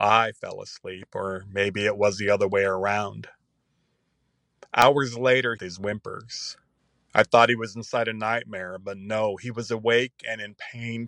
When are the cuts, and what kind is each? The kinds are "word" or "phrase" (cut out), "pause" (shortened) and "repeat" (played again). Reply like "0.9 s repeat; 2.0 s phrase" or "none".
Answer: 5.6 s phrase; 6.8 s pause